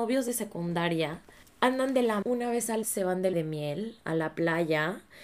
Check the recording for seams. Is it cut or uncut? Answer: cut